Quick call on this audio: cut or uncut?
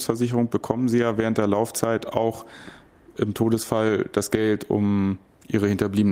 uncut